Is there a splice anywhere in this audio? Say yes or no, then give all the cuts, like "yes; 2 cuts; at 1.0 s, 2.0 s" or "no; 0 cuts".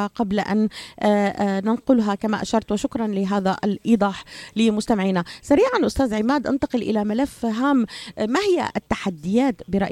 no; 0 cuts